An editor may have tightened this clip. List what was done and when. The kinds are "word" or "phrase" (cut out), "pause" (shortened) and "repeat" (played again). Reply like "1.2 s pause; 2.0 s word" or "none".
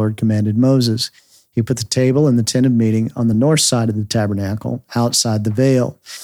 none